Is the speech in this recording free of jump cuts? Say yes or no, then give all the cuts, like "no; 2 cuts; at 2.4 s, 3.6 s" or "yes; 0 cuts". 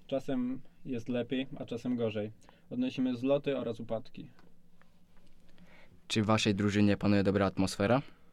yes; 0 cuts